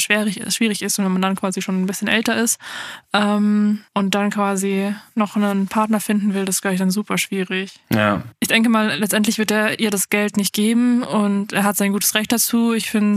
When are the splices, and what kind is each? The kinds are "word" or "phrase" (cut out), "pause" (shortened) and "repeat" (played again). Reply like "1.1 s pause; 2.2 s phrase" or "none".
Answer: 3.9 s pause